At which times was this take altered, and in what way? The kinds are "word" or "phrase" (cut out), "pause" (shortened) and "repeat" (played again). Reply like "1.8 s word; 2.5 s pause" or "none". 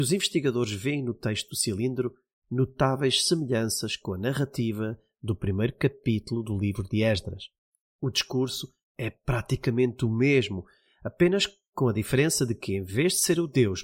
none

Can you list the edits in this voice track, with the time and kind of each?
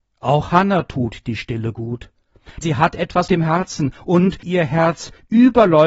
2.6 s word; 3.3 s word; 4.4 s word

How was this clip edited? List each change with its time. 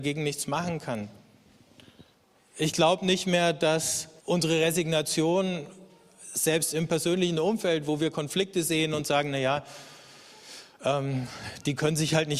4.2 s pause

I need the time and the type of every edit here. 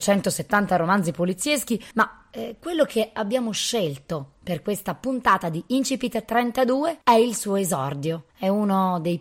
1.9 s pause; 7.0 s pause; 8.3 s pause

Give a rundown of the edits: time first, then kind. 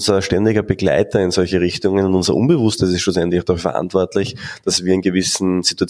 none

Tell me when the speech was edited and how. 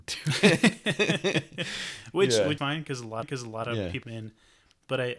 2.6 s word; 3.2 s repeat; 4.0 s phrase

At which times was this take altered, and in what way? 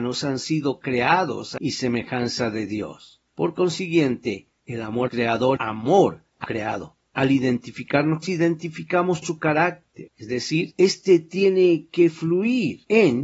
1.6 s word; 5.1 s word; 5.6 s word; 6.4 s word; 8.2 s phrase; 9.2 s word; 10.1 s pause

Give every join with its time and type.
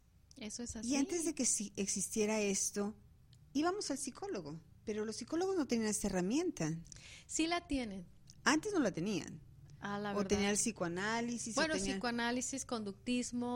4.8 s pause

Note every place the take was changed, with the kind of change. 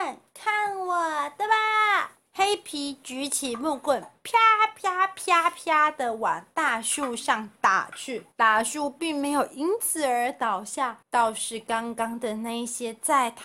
2.3 s pause; 8.3 s pause; 11.0 s pause

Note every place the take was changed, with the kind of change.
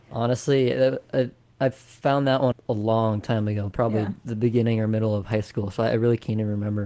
2.5 s word

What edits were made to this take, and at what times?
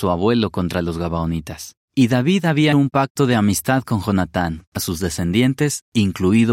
1.8 s pause; 2.7 s word; 4.8 s word

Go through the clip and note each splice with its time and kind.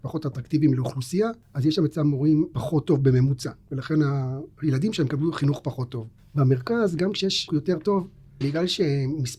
2.5 s word; 4.5 s pause; 7.5 s word; 8.4 s word

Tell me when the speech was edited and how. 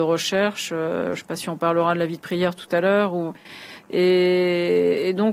none

